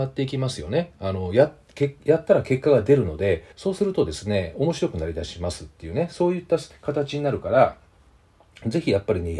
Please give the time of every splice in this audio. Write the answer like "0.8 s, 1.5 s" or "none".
3.5 s, 6.7 s